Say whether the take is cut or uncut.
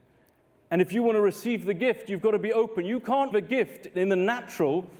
cut